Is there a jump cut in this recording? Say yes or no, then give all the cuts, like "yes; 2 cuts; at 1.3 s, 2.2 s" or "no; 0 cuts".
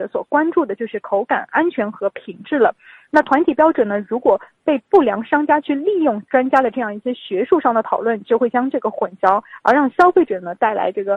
no; 0 cuts